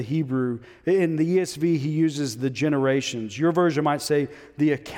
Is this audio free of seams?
yes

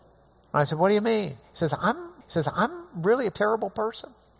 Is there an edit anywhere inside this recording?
yes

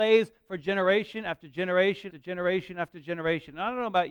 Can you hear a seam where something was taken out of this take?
yes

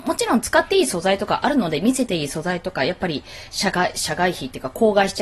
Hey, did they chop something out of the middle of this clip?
no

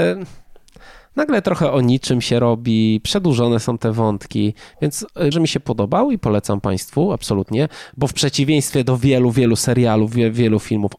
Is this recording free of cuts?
no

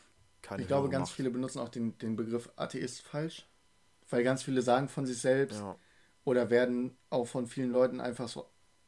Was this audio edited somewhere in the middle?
no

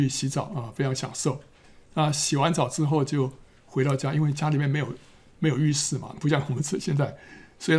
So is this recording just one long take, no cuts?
yes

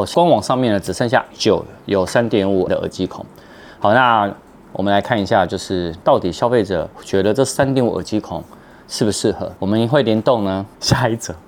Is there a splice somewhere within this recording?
yes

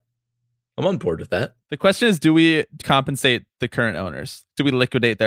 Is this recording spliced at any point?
yes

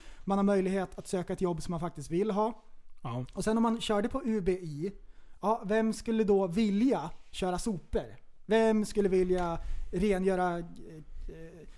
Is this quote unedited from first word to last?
yes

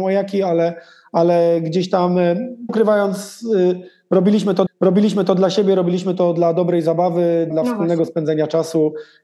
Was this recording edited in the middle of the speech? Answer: yes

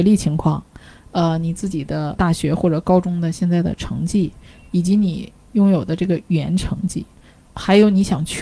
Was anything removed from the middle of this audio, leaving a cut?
no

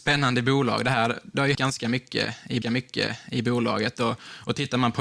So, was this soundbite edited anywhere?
yes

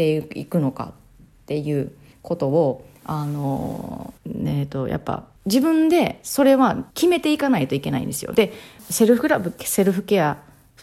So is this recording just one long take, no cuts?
no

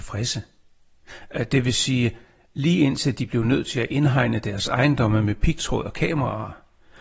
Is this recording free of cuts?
yes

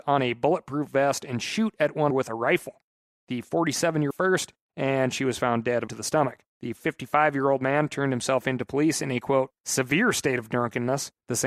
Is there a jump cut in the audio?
yes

